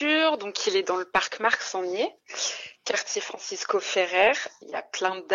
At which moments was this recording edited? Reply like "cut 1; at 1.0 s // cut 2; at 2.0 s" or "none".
none